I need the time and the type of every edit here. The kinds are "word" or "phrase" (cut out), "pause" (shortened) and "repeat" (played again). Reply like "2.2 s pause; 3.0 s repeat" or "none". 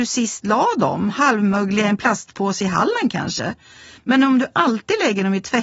none